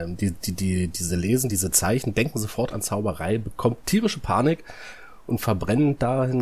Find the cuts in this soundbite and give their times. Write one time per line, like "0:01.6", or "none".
none